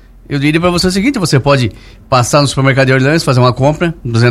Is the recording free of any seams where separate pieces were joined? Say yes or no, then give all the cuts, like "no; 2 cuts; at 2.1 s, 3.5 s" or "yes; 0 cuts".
yes; 0 cuts